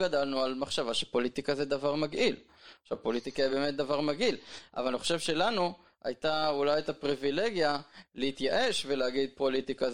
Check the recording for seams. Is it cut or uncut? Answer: uncut